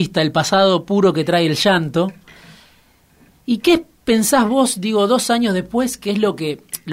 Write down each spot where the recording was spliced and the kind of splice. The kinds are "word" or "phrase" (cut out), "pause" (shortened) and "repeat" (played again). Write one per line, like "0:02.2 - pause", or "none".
none